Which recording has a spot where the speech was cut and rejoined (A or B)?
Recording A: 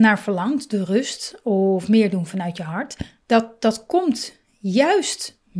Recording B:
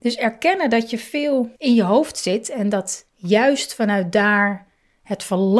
B